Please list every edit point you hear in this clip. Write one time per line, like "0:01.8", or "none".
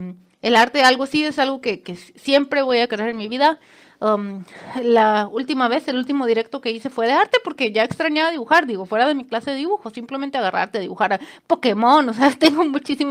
none